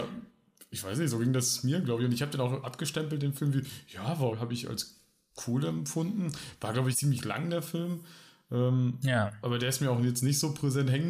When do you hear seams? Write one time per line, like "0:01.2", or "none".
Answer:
0:02.6
0:04.3
0:06.9